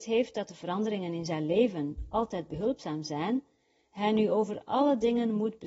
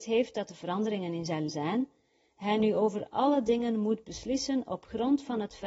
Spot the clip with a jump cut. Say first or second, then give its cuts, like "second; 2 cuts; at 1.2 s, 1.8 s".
second; 1 cut; at 1.5 s